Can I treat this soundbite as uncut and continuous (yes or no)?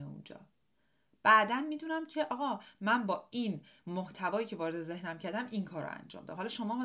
yes